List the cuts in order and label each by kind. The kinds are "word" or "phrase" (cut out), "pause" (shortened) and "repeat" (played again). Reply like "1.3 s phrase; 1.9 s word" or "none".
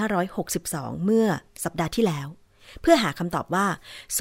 1.5 s pause